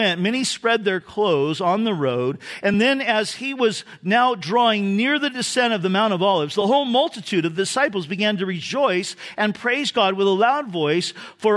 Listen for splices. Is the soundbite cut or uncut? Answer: uncut